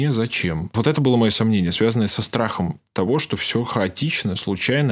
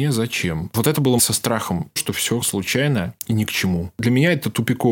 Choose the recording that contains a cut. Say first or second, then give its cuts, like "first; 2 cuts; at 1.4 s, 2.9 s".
second; 4 cuts; at 1.2 s, 2.0 s, 2.4 s, 3.2 s